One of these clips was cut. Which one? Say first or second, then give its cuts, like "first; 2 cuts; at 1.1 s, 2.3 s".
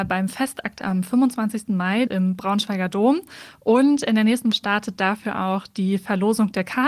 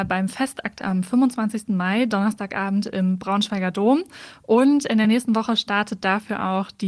first; 2 cuts; at 2.1 s, 4.5 s